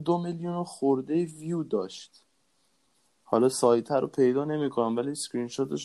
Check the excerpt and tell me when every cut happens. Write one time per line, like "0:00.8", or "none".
none